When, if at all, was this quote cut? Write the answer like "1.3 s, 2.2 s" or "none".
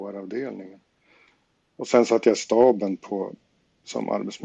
none